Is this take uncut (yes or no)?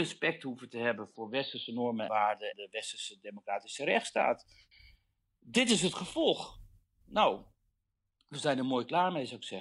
no